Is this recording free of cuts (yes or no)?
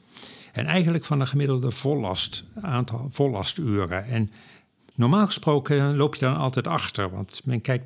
yes